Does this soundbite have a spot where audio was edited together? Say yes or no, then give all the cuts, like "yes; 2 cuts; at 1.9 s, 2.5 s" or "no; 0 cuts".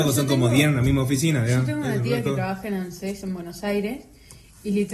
no; 0 cuts